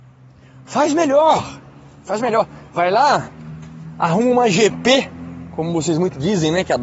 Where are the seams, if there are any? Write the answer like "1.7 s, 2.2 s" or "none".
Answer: none